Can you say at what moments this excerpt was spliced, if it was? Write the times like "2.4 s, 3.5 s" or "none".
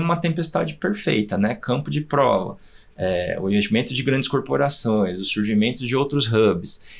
none